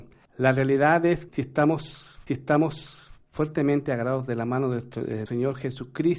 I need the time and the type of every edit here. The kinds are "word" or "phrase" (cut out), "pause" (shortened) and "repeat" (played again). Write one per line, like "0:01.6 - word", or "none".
0:01.3 - word
0:02.3 - repeat
0:05.3 - word